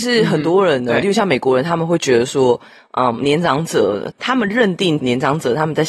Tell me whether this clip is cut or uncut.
uncut